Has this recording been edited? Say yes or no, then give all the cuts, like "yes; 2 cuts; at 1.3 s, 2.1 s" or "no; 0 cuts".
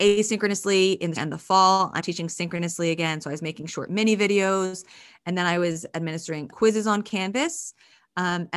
yes; 3 cuts; at 1.2 s, 2.0 s, 6.5 s